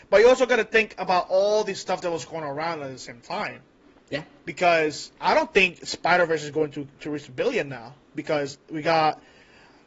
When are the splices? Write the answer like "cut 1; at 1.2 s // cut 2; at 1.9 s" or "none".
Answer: cut 1; at 3.8 s // cut 2; at 5.2 s